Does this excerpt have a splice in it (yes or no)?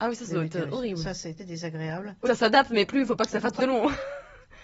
yes